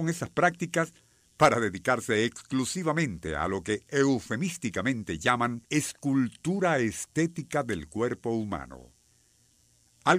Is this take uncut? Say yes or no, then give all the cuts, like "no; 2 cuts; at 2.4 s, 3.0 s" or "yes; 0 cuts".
no; 1 cut; at 5.6 s